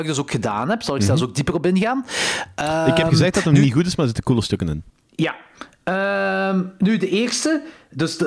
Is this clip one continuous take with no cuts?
no; 1 cut; at 4.9 s

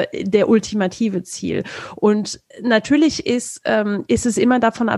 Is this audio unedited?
no; 1 cut; at 2.5 s

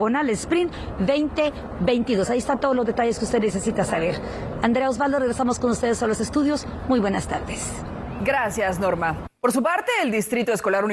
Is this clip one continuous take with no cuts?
no; 1 cut; at 9.4 s

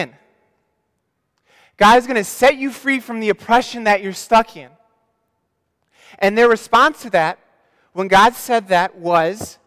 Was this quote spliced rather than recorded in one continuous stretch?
no; 0 cuts

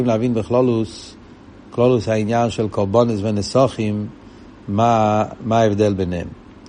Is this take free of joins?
yes; 0 cuts

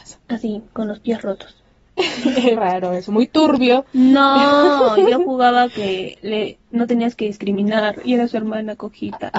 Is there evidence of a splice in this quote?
yes; 1 cut; at 2.6 s

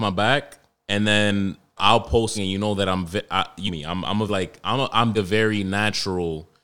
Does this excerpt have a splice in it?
yes; 5 cuts; at 1.8 s, 2.3 s, 3.7 s, 4.3 s, 5.1 s

